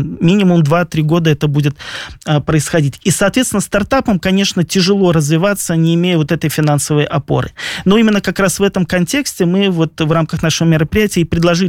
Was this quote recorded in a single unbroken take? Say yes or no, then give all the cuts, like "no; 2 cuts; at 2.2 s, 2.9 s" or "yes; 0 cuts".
yes; 0 cuts